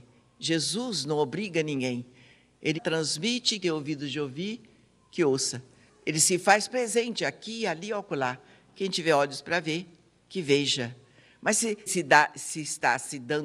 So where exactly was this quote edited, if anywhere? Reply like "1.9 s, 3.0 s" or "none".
2.8 s, 3.6 s, 11.9 s

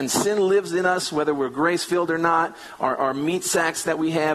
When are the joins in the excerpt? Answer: none

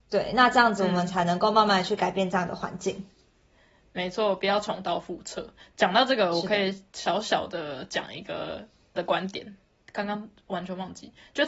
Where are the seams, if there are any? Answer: 8.9 s

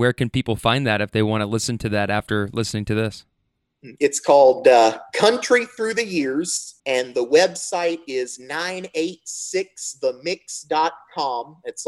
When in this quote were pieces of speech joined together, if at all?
6.8 s

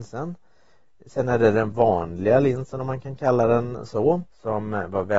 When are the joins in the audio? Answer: 4.3 s

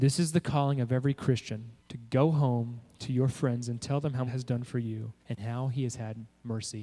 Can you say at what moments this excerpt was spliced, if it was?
1.8 s, 4.3 s, 5.2 s

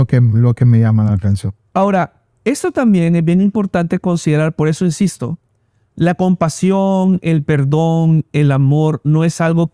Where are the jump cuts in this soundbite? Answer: none

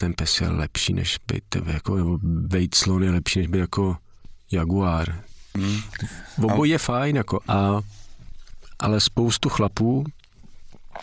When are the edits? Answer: 7.4 s

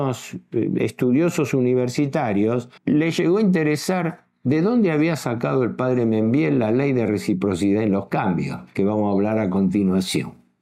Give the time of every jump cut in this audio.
2.8 s

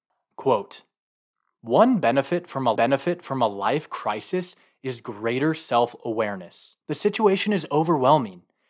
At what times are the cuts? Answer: 2.8 s, 6.8 s

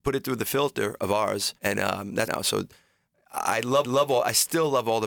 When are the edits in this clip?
1.6 s, 2.3 s, 3.8 s

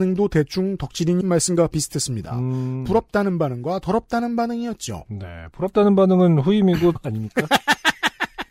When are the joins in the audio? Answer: 1.2 s, 7.0 s

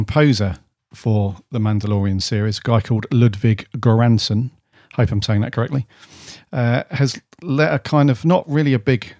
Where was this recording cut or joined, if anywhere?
none

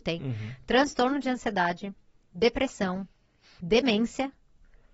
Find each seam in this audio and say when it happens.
none

